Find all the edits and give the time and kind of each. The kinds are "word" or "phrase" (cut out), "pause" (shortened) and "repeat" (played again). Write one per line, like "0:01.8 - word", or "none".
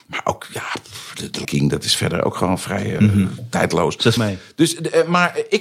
0:01.4 - word
0:03.0 - word
0:04.2 - word